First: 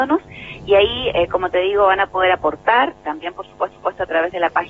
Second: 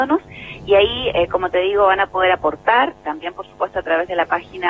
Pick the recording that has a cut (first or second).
first